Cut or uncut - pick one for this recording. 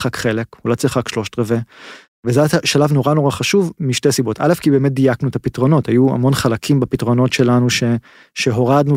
uncut